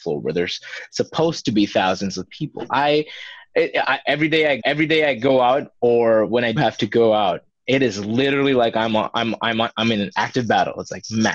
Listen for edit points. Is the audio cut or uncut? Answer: cut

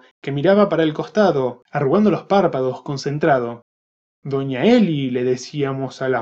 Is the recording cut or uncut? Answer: uncut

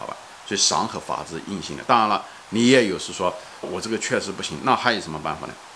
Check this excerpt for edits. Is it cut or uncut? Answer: cut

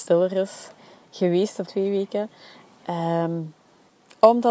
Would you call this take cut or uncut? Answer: cut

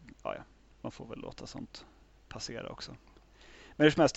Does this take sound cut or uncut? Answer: uncut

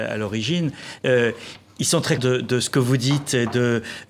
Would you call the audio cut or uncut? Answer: cut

